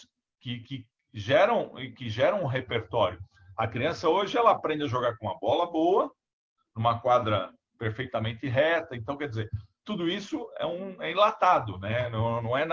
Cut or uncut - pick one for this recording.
uncut